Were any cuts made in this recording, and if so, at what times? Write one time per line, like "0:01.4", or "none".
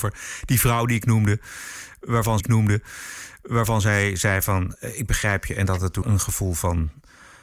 0:02.4
0:06.0